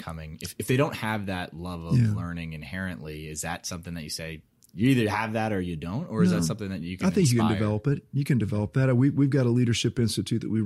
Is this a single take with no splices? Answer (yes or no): yes